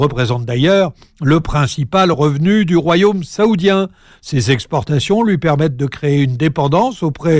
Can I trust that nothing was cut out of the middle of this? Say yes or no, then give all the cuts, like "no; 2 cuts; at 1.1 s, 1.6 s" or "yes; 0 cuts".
yes; 0 cuts